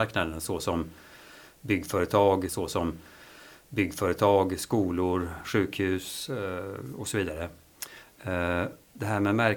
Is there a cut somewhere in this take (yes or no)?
yes